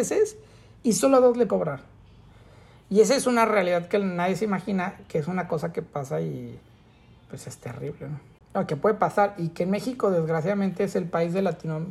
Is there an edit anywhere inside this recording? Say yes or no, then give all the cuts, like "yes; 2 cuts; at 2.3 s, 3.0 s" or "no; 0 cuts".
yes; 1 cut; at 1.5 s